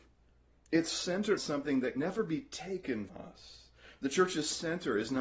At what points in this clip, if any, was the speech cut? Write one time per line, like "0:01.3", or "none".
0:01.4
0:02.0
0:03.1